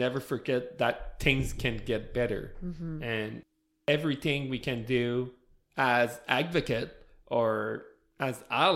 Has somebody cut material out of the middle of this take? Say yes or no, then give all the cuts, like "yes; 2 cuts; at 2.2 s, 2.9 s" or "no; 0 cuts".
no; 0 cuts